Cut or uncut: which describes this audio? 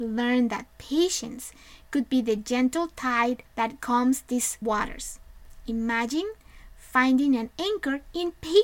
cut